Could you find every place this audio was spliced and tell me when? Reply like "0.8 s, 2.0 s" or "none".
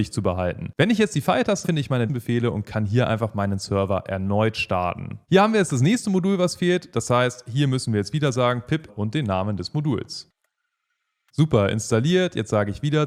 1.6 s, 2.1 s, 5.2 s, 8.9 s